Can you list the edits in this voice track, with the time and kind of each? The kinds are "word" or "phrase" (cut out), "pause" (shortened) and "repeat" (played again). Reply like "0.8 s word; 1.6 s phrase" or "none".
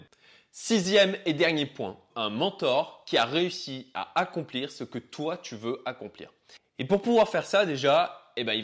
2.1 s word